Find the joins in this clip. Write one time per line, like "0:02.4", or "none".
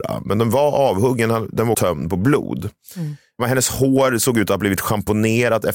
0:01.7

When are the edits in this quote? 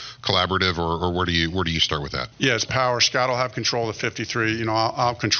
0:02.3
0:02.6

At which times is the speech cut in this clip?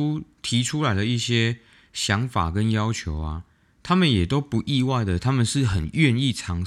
none

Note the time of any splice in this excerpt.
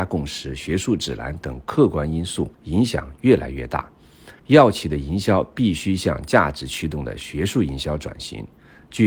0:02.5
0:04.4

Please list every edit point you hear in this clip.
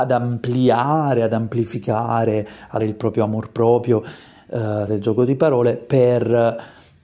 0:02.8
0:04.9

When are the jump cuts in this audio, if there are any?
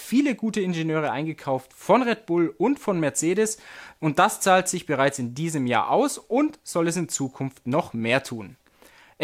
none

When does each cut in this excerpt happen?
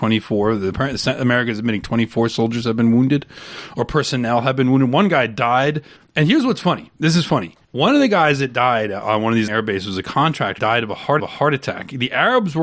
0:06.0
0:06.9
0:07.6
0:09.5
0:10.6
0:11.2

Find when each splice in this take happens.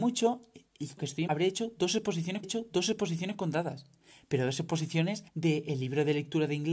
0:01.0
0:01.3
0:02.4
0:05.3

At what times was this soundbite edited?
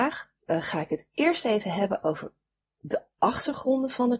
none

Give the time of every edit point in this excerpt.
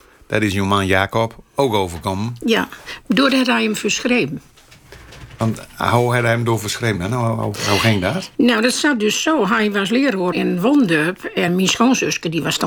0:08.3
0:10.3
0:11.5

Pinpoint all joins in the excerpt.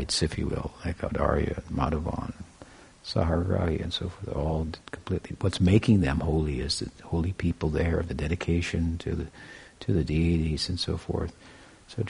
none

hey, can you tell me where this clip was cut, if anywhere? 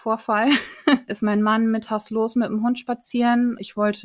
none

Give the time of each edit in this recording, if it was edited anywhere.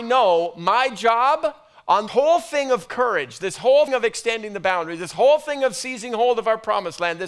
0:02.1
0:03.9

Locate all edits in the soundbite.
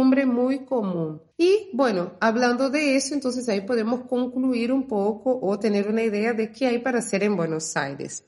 0:01.3

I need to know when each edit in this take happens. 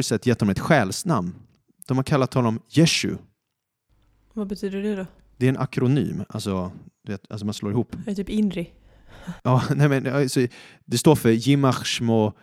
none

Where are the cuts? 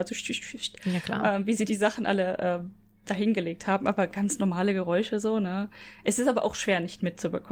none

